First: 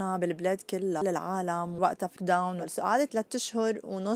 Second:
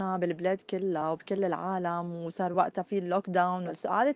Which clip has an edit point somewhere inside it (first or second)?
first